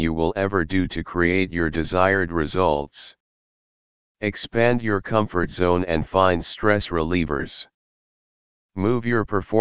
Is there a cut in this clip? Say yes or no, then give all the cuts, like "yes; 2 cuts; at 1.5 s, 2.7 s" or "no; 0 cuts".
no; 0 cuts